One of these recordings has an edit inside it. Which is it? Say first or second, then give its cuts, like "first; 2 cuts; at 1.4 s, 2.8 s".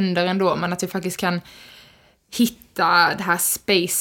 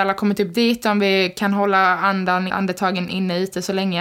second; 1 cut; at 2.5 s